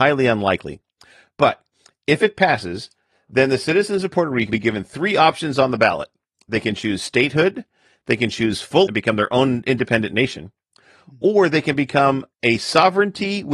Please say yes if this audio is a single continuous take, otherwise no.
no